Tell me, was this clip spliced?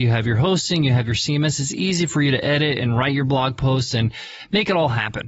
no; 0 cuts

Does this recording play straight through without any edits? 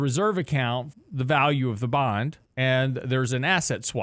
no; 2 cuts; at 0.9 s, 2.4 s

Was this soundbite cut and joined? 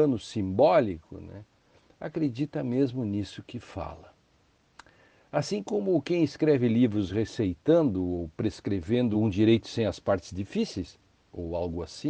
no; 0 cuts

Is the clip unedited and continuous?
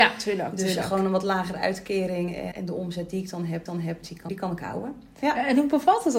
no; 3 cuts; at 2.5 s, 3.7 s, 4.3 s

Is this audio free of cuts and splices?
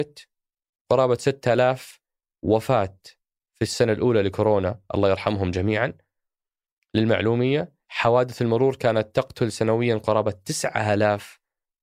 yes; 0 cuts

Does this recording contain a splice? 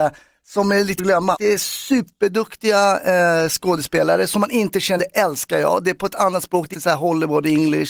yes; 4 cuts; at 1.0 s, 1.4 s, 5.0 s, 6.7 s

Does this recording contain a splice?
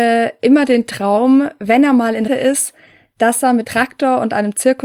yes; 2 cuts; at 2.3 s, 3.6 s

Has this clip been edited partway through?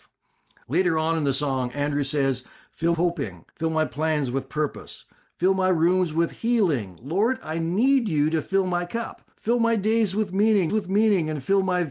yes; 4 cuts; at 2.9 s, 3.5 s, 9.3 s, 10.7 s

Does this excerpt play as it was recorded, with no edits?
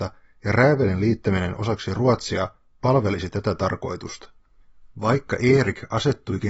yes; 0 cuts

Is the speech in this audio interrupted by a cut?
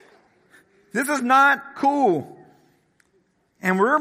no; 0 cuts

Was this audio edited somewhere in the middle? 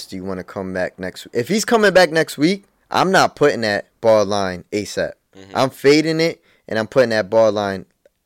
yes; 1 cut; at 2.8 s

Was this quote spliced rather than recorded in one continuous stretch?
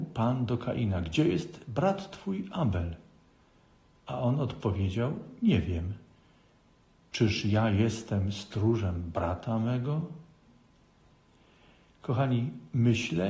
no; 0 cuts

